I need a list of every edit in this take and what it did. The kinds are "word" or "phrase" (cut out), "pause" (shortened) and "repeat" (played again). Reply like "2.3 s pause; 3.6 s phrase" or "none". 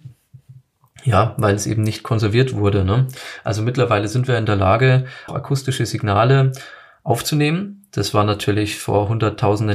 5.3 s word